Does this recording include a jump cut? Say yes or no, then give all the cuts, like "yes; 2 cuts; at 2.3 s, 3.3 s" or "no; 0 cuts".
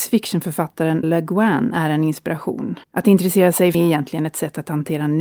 yes; 3 cuts; at 1.0 s, 2.8 s, 3.7 s